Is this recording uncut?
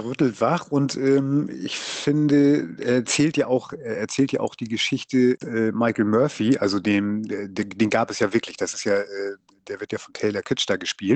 no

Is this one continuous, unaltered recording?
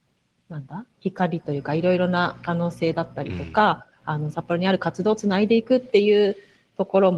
no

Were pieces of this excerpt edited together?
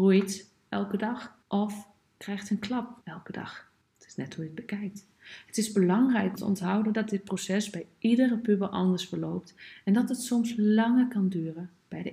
yes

